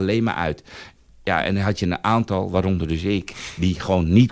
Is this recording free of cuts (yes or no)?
yes